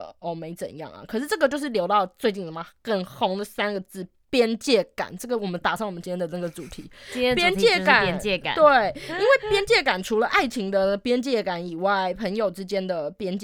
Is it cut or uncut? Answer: uncut